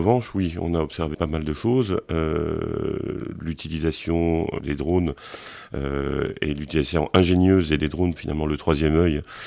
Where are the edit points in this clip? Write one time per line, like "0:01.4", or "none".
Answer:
0:01.1
0:04.6
0:07.8
0:08.2